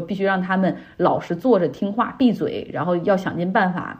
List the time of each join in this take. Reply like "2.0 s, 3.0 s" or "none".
none